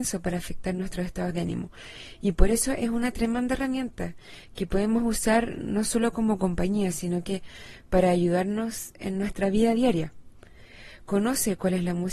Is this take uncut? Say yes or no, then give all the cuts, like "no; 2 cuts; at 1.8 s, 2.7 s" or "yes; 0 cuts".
yes; 0 cuts